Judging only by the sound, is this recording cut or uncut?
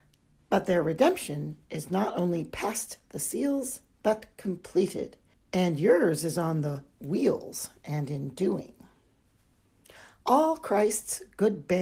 cut